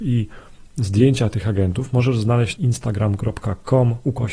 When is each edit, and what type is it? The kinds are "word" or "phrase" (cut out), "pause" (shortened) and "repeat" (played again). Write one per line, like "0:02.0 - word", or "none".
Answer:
0:02.6 - phrase